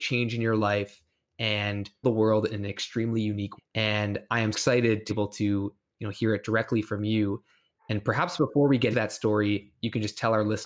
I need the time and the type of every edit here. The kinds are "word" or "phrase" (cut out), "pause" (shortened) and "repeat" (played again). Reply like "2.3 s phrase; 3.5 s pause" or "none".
2.0 s word; 3.6 s word; 4.5 s word; 5.1 s word; 7.8 s word; 8.9 s word